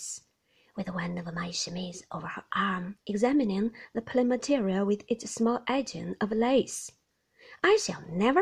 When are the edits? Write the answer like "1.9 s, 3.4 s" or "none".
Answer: 3.0 s